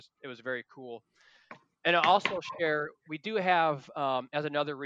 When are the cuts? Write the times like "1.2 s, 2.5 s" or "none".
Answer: none